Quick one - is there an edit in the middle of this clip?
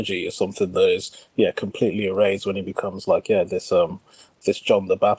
no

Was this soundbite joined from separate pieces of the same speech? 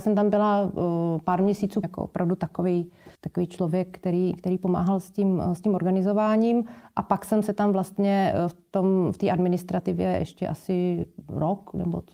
yes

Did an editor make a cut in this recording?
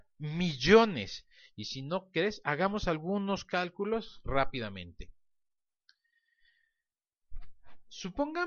no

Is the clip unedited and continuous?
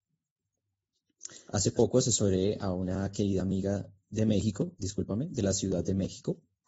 yes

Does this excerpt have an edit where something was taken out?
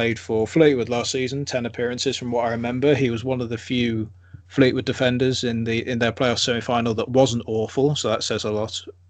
no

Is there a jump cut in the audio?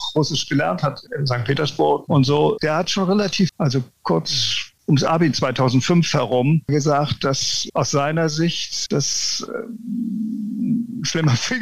yes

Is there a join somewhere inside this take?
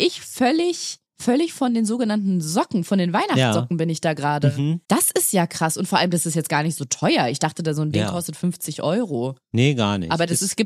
yes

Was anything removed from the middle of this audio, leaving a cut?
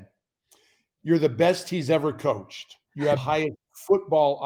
yes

